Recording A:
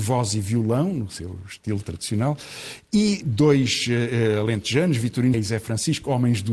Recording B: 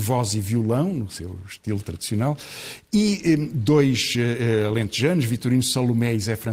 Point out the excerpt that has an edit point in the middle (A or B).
A